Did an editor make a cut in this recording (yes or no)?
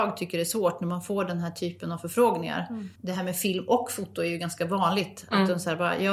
yes